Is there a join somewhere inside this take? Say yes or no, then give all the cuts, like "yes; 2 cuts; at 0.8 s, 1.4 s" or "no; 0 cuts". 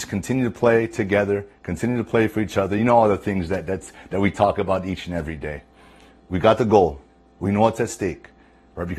no; 0 cuts